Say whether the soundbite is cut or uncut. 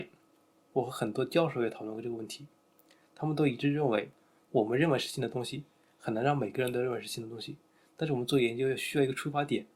uncut